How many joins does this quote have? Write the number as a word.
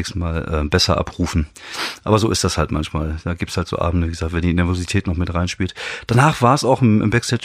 zero